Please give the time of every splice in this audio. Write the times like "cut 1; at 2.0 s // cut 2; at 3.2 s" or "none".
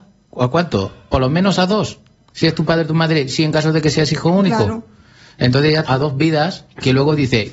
cut 1; at 5.9 s